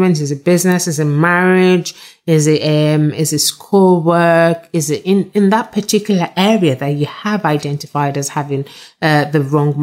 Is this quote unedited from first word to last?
yes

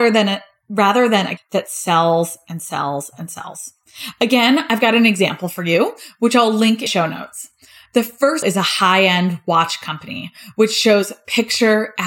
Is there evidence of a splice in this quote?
yes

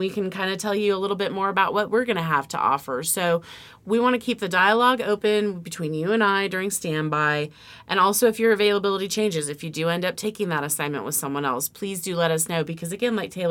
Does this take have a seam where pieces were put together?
no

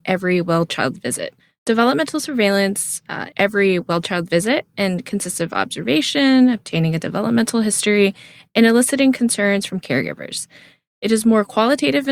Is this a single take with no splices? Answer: no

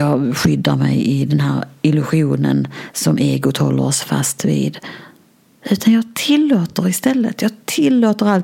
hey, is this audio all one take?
yes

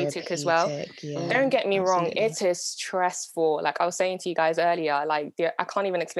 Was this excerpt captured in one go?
yes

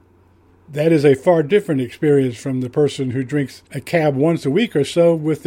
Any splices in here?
yes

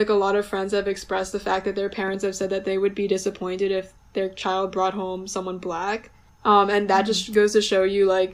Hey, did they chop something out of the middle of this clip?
no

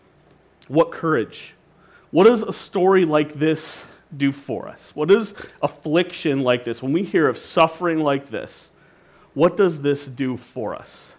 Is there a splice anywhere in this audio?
no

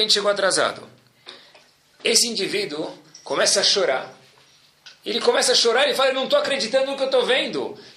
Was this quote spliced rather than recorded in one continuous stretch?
no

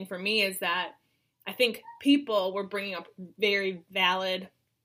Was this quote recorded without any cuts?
yes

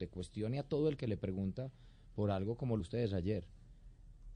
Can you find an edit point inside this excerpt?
yes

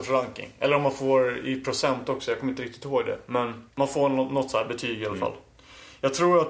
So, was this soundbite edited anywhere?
yes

